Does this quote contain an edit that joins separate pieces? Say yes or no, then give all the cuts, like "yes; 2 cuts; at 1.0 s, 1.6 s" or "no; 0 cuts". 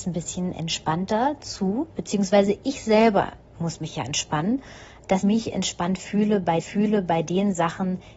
yes; 2 cuts; at 5.2 s, 6.6 s